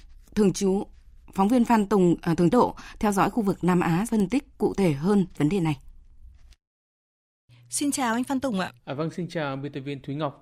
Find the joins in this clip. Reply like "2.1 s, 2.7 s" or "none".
2.5 s, 4.1 s, 5.4 s, 8.8 s